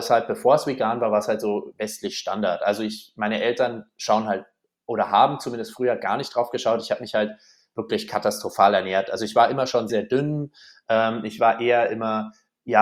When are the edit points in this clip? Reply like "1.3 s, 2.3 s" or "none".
9.9 s